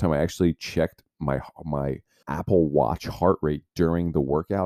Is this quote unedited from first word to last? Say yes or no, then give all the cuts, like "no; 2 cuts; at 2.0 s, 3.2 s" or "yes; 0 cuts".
no; 1 cut; at 2.2 s